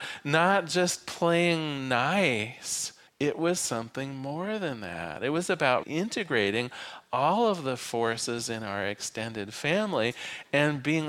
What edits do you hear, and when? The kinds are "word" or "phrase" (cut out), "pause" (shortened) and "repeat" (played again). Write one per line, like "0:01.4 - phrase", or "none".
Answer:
0:03.1 - pause
0:05.8 - word